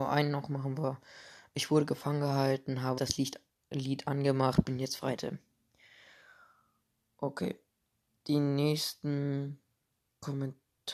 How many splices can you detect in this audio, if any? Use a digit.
2